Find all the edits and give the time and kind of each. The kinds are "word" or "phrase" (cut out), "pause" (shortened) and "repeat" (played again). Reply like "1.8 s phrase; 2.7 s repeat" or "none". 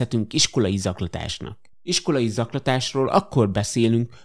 1.7 s pause